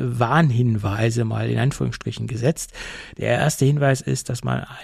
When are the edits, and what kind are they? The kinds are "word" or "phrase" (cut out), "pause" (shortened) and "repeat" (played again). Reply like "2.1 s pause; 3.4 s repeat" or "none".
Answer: none